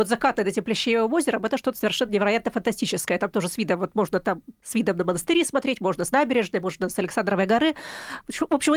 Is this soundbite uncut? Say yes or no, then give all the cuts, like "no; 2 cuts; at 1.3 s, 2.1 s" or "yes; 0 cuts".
yes; 0 cuts